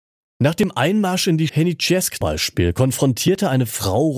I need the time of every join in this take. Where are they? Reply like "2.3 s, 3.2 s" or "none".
1.5 s, 2.2 s

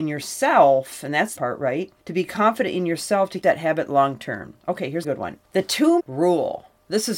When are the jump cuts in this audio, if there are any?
1.4 s, 2.0 s, 3.4 s, 5.0 s, 5.4 s, 6.0 s

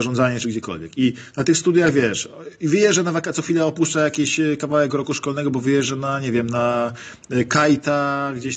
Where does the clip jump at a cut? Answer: none

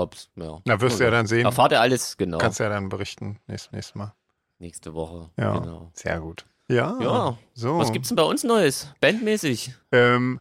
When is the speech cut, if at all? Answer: 3.7 s

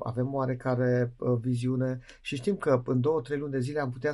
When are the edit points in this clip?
none

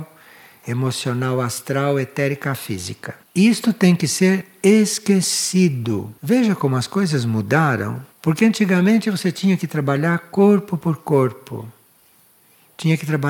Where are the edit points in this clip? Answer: 3.2 s, 6.2 s, 8.1 s

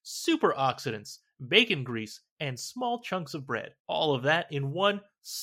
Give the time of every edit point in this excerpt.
3.8 s

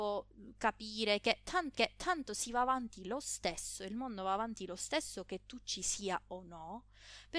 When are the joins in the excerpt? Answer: 1.7 s

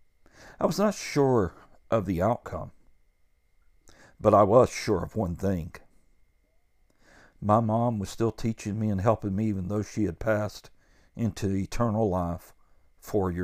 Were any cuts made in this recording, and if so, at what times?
none

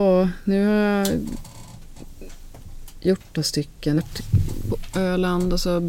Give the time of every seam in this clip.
3.3 s, 4.0 s, 4.7 s

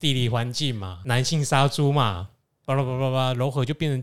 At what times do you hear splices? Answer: none

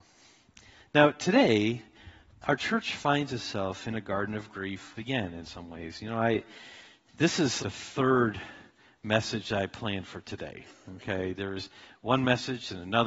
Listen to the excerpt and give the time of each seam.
5.0 s, 7.6 s

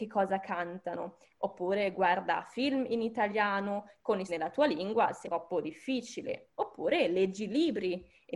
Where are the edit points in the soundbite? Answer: 4.3 s, 5.2 s

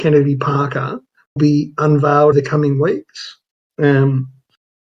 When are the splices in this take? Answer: 1.4 s, 2.3 s

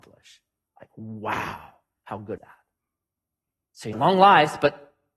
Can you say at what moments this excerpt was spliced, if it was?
2.4 s, 3.9 s

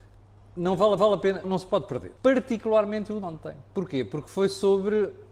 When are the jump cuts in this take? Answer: 1.0 s, 1.4 s, 2.2 s, 3.2 s

